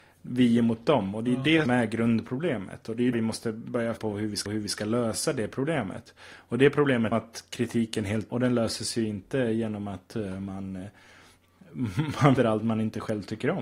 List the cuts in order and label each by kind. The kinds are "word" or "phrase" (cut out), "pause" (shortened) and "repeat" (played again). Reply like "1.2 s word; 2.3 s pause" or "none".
1.7 s word; 3.1 s word; 4.0 s word; 4.5 s repeat; 7.1 s phrase; 8.3 s word; 12.4 s word